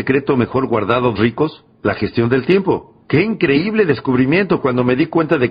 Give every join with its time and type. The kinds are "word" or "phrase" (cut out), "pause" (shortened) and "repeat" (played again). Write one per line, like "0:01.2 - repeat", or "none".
0:01.2 - word
0:01.7 - pause
0:03.0 - pause